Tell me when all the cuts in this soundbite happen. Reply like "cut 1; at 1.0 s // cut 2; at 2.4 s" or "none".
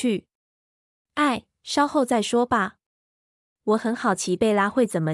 none

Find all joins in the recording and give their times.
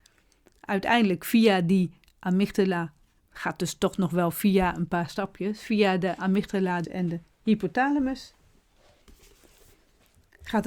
cut 1; at 3.2 s // cut 2; at 6.8 s

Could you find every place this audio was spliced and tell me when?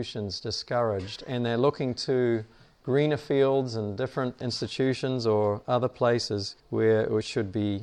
cut 1; at 4.4 s // cut 2; at 6.6 s

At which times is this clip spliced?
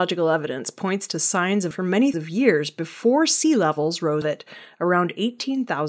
cut 1; at 1.7 s // cut 2; at 2.1 s // cut 3; at 4.2 s

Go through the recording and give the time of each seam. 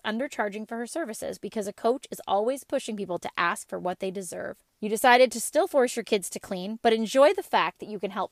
none

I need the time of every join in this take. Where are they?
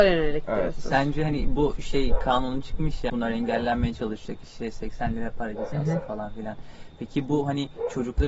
cut 1; at 3.1 s

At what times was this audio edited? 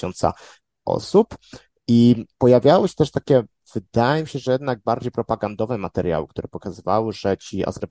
none

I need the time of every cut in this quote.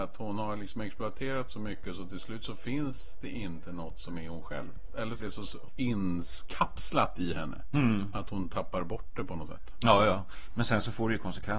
cut 1; at 5.2 s // cut 2; at 5.7 s

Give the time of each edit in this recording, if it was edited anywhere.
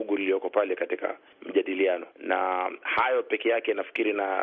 cut 1; at 2.1 s

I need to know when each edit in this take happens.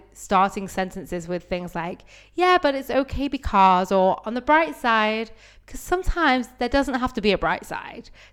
none

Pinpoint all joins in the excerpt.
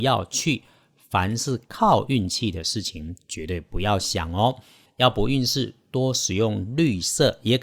cut 1; at 1.6 s

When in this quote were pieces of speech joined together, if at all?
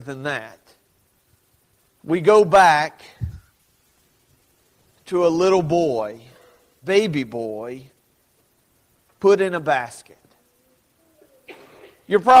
cut 1; at 6.8 s

